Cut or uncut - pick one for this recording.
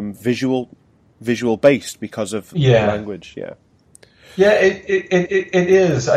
cut